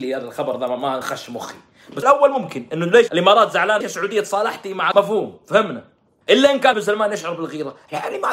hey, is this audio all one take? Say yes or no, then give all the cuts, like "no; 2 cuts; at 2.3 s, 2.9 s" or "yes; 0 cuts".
no; 7 cuts; at 1.0 s, 2.0 s, 3.1 s, 3.8 s, 4.9 s, 6.2 s, 6.7 s